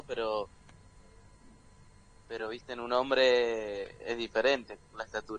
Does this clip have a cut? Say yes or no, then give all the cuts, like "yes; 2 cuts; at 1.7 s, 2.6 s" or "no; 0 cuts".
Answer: no; 0 cuts